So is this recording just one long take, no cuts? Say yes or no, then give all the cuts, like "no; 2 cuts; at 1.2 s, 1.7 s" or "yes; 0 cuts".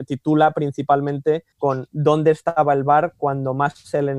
no; 1 cut; at 1.5 s